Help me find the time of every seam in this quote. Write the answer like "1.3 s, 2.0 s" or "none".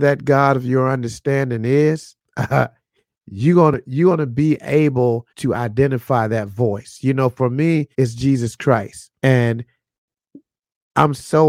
2.3 s, 5.3 s, 7.9 s, 9.2 s